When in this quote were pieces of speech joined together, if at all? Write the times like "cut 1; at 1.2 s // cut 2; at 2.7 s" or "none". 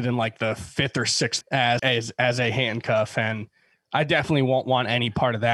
cut 1; at 1.4 s // cut 2; at 1.8 s

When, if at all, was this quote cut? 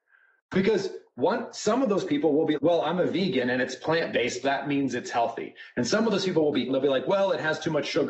cut 1; at 2.5 s // cut 2; at 4.4 s // cut 3; at 6.7 s

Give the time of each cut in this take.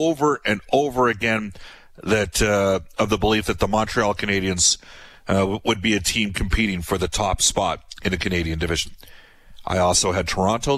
none

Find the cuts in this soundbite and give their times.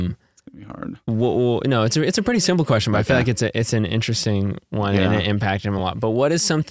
none

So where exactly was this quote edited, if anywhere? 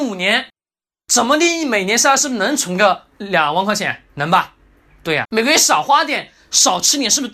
cut 1; at 3.1 s // cut 2; at 5.2 s

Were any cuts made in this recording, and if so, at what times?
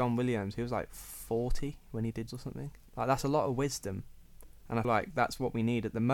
cut 1; at 2.3 s // cut 2; at 2.8 s // cut 3; at 4.8 s

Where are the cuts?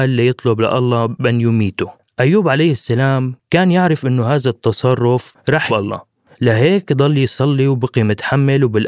cut 1; at 5.7 s

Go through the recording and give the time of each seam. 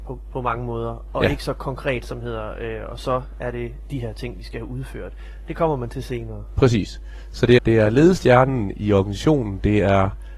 cut 1; at 7.6 s

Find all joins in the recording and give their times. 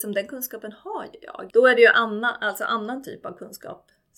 none

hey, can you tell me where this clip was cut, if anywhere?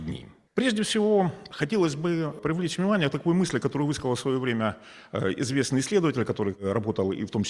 none

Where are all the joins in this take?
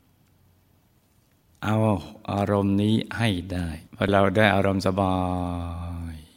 cut 1; at 3.9 s

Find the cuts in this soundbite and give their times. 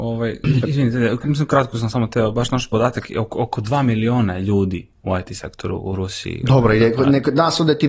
none

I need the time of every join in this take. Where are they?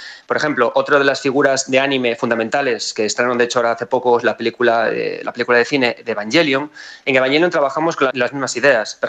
cut 1; at 8.1 s

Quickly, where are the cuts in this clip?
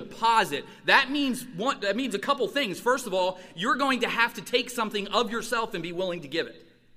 none

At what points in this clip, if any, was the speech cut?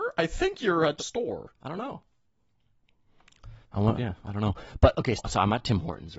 cut 1; at 1.0 s // cut 2; at 1.6 s // cut 3; at 3.6 s // cut 4; at 4.0 s // cut 5; at 5.2 s

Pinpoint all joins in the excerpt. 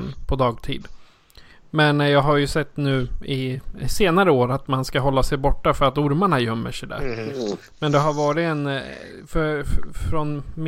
none

